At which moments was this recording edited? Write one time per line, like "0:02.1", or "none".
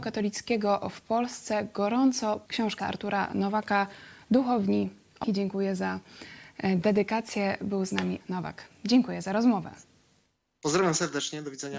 0:02.5
0:02.8
0:05.2
0:08.2